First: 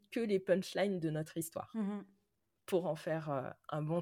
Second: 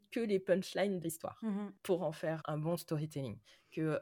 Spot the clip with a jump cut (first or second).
second